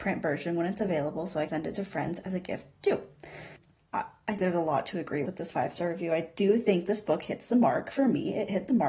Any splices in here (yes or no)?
yes